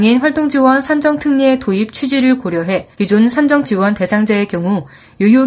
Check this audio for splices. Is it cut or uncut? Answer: cut